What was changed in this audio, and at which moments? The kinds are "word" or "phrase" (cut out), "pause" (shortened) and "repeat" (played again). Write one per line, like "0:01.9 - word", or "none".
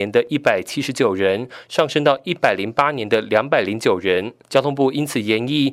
0:04.4 - pause